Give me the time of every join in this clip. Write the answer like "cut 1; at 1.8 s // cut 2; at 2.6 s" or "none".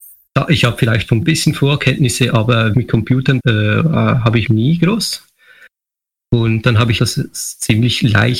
cut 1; at 1.2 s // cut 2; at 2.7 s // cut 3; at 3.4 s // cut 4; at 4.5 s // cut 5; at 7.0 s